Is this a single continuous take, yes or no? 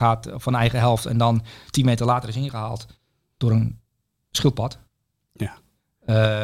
yes